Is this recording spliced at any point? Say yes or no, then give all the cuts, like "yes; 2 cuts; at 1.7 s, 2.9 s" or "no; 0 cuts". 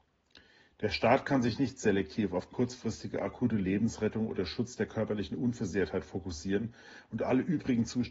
no; 0 cuts